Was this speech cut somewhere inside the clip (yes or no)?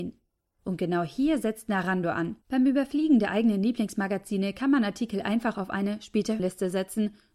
yes